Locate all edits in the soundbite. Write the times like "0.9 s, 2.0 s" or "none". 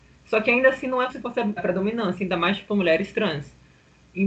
1.1 s, 1.6 s